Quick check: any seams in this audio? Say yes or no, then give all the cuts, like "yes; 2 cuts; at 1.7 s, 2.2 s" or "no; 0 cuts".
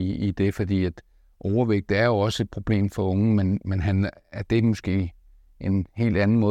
no; 0 cuts